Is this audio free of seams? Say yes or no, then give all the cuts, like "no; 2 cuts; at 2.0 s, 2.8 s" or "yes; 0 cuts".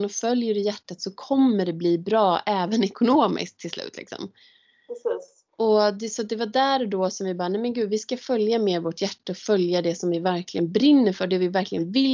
no; 1 cut; at 5.5 s